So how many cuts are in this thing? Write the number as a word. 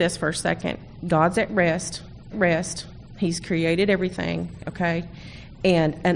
one